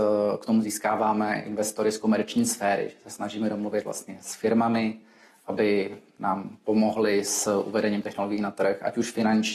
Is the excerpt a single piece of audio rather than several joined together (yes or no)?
yes